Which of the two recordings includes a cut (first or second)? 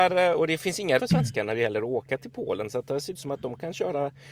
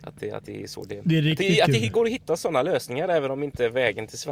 first